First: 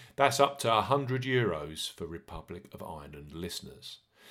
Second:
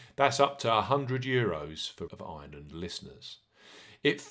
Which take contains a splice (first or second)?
second